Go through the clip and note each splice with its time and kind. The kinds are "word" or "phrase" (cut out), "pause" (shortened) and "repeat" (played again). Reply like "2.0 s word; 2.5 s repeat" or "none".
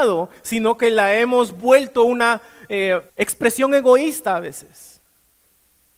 3.1 s pause